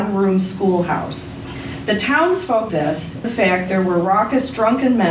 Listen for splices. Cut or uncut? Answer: cut